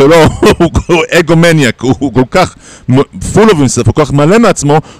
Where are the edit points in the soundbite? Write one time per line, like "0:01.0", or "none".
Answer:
none